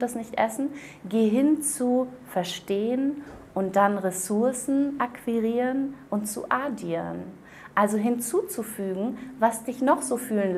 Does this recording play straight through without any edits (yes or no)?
yes